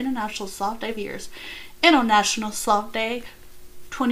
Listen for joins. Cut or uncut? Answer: cut